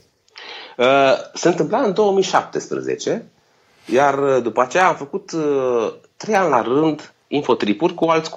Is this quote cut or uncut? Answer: uncut